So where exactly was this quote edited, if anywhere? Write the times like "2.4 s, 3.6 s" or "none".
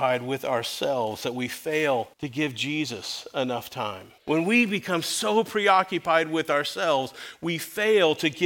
2.1 s, 4.2 s